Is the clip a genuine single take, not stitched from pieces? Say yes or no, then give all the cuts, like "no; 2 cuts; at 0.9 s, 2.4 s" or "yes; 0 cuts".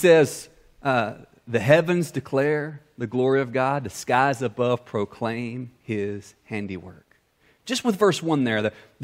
yes; 0 cuts